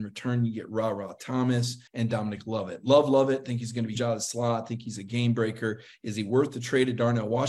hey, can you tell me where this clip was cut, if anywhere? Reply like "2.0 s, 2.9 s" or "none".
1.9 s, 4.0 s